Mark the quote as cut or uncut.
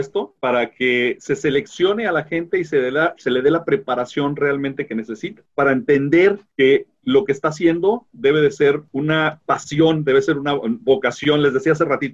uncut